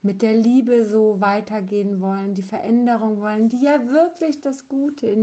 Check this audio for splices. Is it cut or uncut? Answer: uncut